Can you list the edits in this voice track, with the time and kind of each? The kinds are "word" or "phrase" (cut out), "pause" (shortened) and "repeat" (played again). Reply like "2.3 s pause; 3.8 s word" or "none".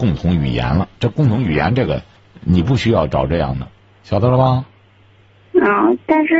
2.2 s pause

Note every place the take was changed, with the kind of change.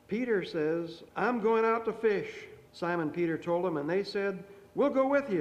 1.1 s pause; 2.7 s pause

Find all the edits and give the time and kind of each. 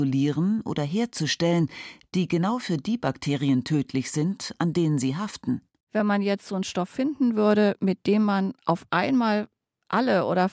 none

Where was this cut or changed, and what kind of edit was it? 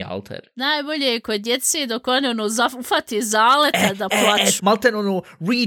4.6 s word

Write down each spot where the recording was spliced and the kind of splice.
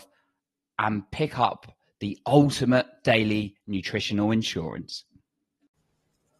none

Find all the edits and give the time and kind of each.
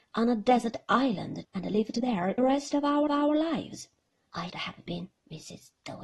1.4 s word; 2.4 s phrase; 3.1 s repeat; 4.5 s word

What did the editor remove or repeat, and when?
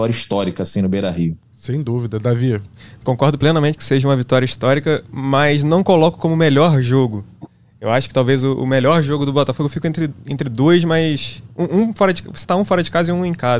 none

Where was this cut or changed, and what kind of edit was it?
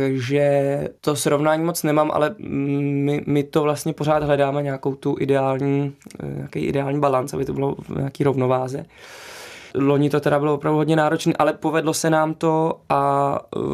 1.0 s pause; 9.7 s pause

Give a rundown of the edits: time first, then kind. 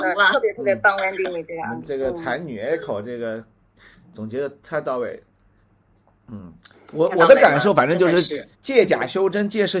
8.5 s pause

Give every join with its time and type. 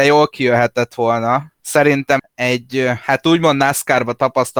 1.6 s word; 2.2 s word

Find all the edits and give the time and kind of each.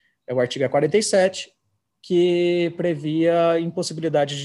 none

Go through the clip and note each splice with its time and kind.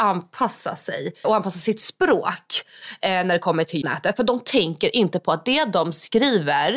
1.2 s word; 3.8 s word

